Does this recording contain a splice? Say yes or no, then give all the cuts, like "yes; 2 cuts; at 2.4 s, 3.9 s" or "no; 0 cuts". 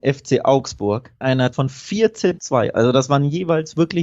yes; 3 cuts; at 1.2 s, 1.5 s, 2.4 s